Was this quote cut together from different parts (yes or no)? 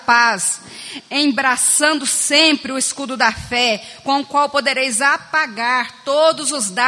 no